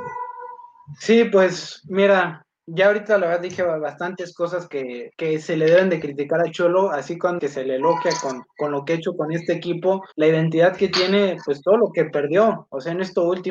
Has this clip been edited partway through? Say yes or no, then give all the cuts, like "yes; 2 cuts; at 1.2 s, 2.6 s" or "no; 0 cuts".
yes; 3 cuts; at 5.1 s, 7.4 s, 10.1 s